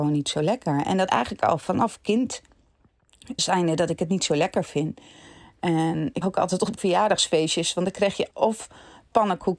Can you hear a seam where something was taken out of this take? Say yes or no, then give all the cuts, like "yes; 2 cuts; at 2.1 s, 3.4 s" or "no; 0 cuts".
yes; 5 cuts; at 1.1 s, 3.4 s, 6.2 s, 6.8 s, 8.3 s